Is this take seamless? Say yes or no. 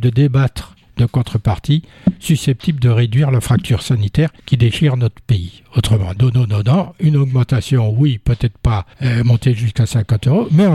no